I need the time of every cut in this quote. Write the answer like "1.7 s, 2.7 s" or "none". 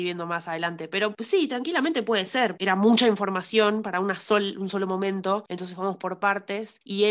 2.6 s